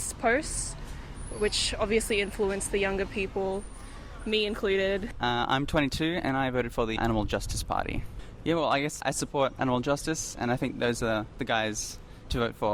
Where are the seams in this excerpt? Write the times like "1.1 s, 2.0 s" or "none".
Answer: 7.0 s, 9.0 s